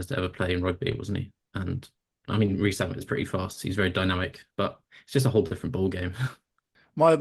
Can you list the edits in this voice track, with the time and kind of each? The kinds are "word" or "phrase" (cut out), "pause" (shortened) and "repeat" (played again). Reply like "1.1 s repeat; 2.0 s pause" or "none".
4.5 s pause